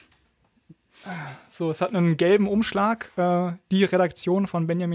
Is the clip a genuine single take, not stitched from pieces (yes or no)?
yes